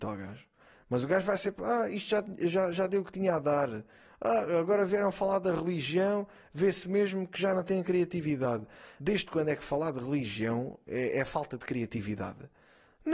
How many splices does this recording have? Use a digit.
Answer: 0